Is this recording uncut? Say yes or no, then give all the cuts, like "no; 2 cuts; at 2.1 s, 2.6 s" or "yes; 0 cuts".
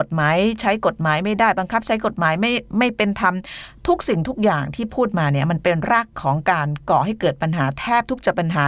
no; 1 cut; at 6.1 s